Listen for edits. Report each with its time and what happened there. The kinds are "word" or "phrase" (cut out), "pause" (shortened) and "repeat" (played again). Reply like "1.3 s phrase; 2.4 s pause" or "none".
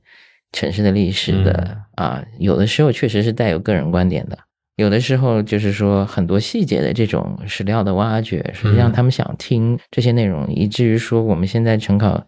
none